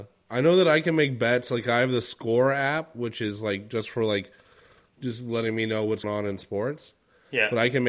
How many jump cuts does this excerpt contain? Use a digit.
1